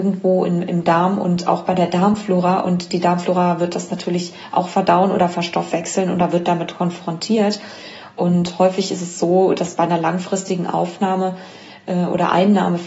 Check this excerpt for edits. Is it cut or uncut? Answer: uncut